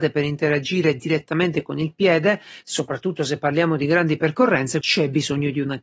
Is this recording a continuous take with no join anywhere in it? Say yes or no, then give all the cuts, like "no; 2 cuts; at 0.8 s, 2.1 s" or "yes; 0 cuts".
no; 1 cut; at 4.8 s